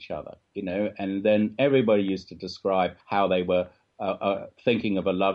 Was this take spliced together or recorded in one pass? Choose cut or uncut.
cut